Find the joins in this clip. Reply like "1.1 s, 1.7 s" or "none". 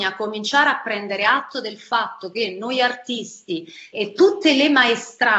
3.9 s